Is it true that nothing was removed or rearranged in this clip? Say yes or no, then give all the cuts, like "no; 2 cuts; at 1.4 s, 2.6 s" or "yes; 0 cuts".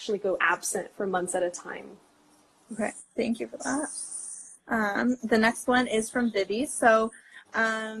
yes; 0 cuts